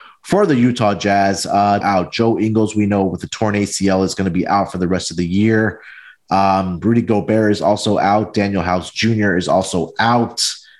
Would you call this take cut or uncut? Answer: cut